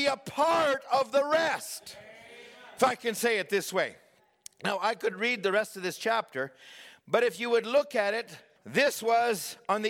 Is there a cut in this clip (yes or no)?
yes